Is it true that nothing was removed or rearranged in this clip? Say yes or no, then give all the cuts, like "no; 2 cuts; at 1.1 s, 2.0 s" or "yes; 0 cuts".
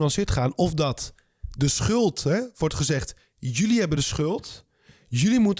yes; 0 cuts